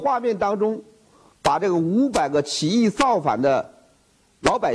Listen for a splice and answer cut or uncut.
uncut